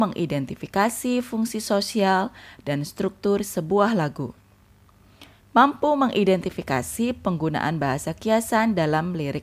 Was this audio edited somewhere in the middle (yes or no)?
yes